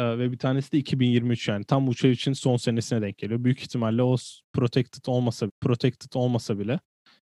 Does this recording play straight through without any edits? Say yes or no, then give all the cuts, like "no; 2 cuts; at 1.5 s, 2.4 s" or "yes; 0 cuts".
no; 1 cut; at 5.5 s